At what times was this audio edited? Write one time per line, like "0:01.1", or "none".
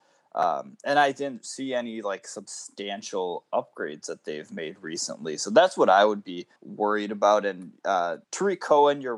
0:06.6
0:08.2